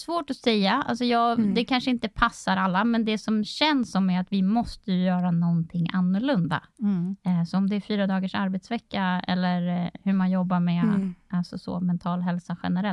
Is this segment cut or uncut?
uncut